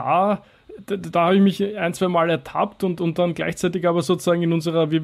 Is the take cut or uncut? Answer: uncut